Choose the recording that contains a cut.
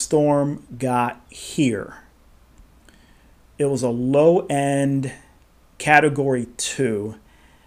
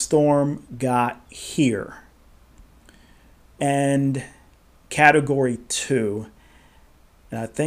second; 1 cut; at 3.6 s

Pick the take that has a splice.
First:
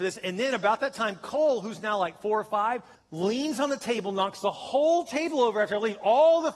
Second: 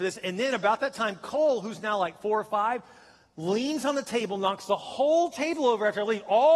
first; 1 cut; at 3.0 s

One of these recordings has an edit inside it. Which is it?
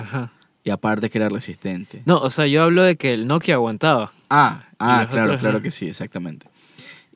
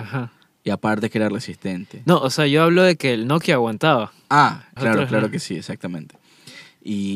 second; 1 cut; at 4.8 s

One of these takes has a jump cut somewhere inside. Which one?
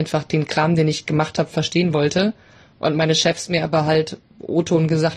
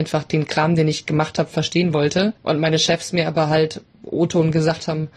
second; 1 cut; at 2.4 s

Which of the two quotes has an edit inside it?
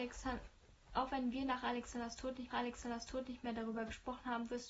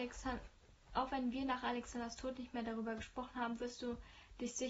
first; 1 cut; at 2.5 s

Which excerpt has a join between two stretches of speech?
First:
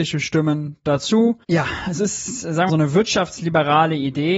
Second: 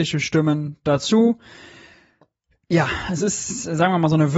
first; 2 cuts; at 1.4 s, 2.7 s

